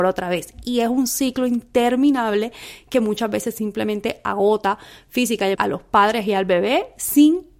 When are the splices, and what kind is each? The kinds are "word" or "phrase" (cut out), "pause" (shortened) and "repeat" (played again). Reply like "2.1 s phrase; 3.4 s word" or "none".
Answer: 5.5 s word